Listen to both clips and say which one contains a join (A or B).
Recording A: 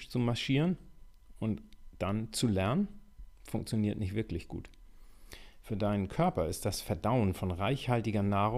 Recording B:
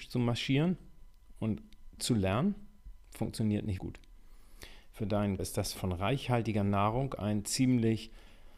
B